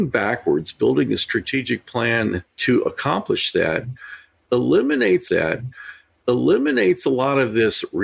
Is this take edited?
yes; 2 cuts; at 2.5 s, 5.3 s

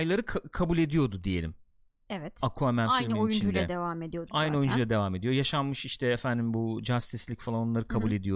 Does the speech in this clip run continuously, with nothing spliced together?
yes; 0 cuts

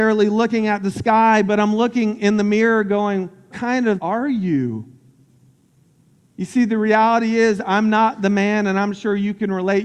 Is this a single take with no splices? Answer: no; 2 cuts; at 3.5 s, 4.0 s

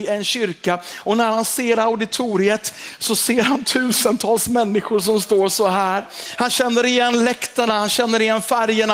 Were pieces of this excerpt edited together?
no; 0 cuts

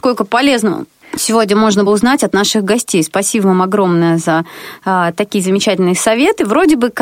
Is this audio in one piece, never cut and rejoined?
no; 2 cuts; at 1.0 s, 1.9 s

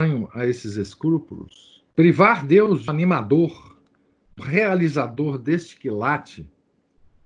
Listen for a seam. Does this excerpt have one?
yes; 3 cuts; at 1.9 s, 2.9 s, 4.4 s

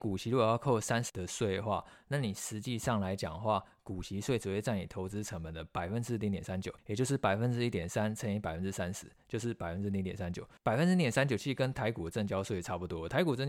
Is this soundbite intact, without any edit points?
no; 3 cuts; at 1.1 s, 6.8 s, 10.6 s

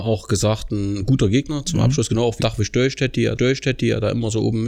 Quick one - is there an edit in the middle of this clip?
yes; 2 cuts; at 2.4 s, 3.4 s

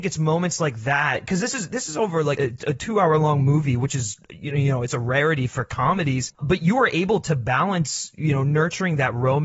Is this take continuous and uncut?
no; 1 cut; at 2.4 s

